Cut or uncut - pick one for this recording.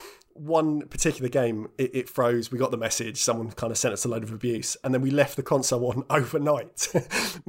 uncut